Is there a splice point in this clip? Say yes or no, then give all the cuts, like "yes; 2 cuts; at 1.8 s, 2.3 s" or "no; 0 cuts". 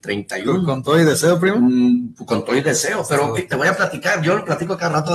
no; 0 cuts